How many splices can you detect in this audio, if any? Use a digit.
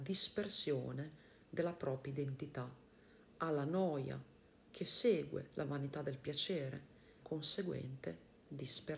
1